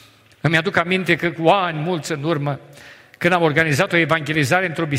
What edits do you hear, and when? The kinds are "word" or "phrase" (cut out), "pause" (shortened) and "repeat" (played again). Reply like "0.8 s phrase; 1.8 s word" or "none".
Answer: none